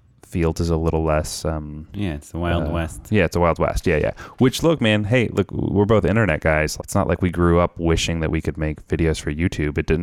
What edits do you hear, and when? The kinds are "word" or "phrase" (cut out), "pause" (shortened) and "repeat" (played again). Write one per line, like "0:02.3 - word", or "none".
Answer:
0:06.8 - word